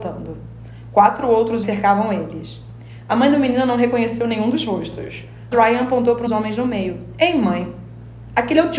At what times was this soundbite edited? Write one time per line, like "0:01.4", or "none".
0:01.6
0:05.5
0:06.3